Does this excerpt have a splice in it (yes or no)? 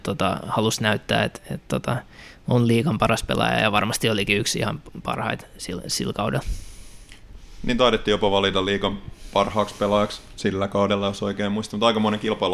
no